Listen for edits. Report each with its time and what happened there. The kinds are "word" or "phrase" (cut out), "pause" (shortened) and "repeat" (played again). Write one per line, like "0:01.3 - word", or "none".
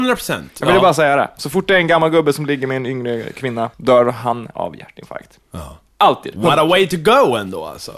0:03.7 - pause